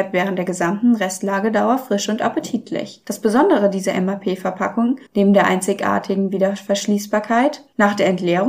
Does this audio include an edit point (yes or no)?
yes